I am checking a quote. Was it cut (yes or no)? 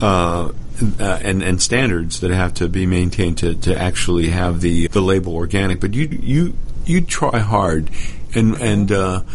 yes